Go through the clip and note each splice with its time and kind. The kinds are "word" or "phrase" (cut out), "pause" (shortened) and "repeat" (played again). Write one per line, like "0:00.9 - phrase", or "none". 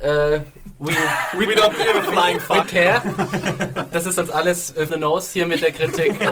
0:01.5 - phrase
0:02.6 - word
0:04.9 - phrase